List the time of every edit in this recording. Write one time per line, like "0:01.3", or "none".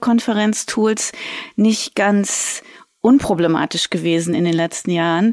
none